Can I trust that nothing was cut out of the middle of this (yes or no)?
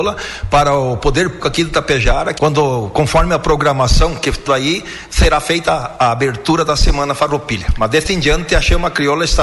no